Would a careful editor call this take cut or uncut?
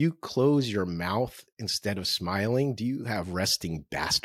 uncut